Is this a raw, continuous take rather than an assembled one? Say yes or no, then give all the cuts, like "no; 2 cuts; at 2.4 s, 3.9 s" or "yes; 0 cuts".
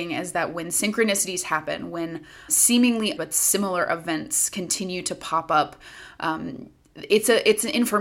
no; 2 cuts; at 2.5 s, 3.2 s